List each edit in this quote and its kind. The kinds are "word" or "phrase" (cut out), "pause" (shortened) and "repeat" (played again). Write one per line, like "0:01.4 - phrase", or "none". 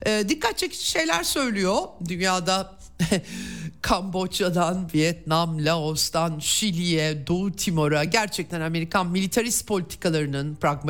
none